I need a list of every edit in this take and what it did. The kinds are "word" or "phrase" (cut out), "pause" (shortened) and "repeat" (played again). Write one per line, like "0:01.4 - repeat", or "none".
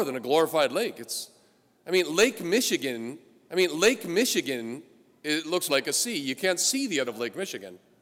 0:03.5 - repeat
0:05.7 - word
0:07.1 - word